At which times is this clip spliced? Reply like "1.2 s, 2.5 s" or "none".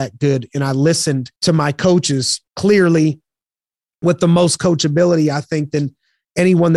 1.4 s, 2.5 s